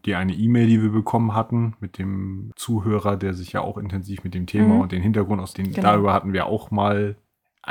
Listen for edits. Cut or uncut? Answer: cut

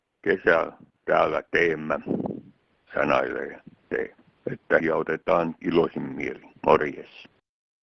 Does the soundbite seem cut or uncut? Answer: cut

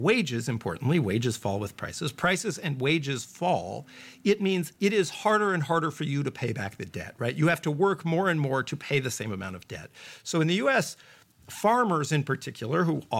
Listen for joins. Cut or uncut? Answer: uncut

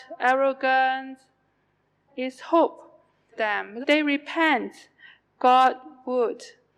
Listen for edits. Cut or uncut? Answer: cut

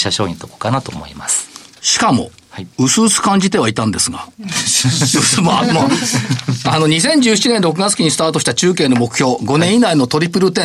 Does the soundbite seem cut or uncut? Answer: cut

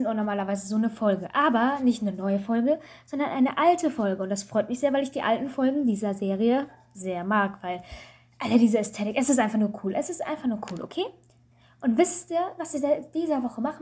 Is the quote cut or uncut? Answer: uncut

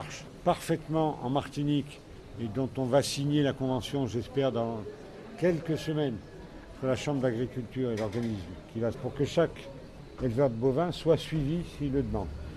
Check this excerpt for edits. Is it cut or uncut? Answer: cut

